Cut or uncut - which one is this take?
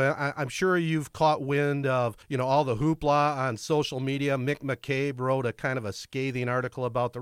cut